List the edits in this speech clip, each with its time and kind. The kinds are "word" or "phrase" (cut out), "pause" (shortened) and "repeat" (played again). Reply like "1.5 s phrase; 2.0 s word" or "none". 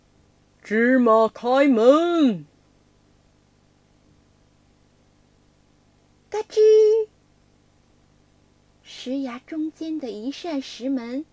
none